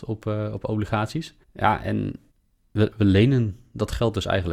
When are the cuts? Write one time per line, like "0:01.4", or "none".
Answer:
0:01.4
0:02.3